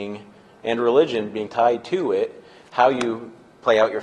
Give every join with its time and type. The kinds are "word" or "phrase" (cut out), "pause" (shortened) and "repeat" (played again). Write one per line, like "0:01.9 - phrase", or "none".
0:01.5 - word